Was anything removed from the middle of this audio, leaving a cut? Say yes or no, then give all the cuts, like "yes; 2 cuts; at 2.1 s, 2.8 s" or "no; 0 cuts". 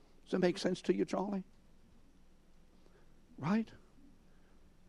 no; 0 cuts